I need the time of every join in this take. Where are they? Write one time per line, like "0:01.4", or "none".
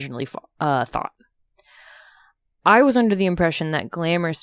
none